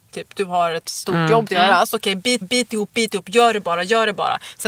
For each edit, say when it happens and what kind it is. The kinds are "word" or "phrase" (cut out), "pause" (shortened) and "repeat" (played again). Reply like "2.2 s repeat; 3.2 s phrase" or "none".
1.5 s phrase; 2.4 s repeat